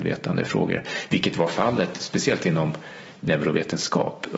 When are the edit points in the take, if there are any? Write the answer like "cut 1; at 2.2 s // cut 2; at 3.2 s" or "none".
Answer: none